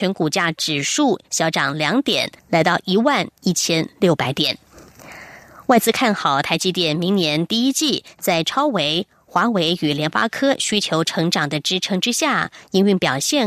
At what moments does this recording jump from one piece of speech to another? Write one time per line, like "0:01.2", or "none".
0:02.4